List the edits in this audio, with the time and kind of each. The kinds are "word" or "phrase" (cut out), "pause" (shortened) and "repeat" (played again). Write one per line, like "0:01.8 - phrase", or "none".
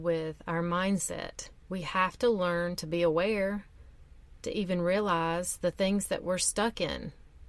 none

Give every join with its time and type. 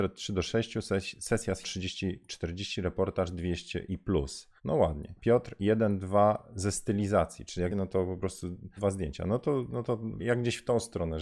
0:01.6 - word
0:04.6 - pause
0:05.2 - pause
0:07.7 - phrase
0:08.8 - phrase
0:10.2 - word

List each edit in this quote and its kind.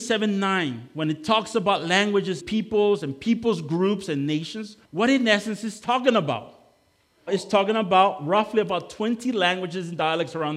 0:02.4 - word
0:04.8 - pause
0:07.3 - word

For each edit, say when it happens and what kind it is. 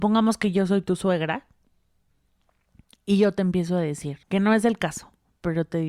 0:04.2 - pause

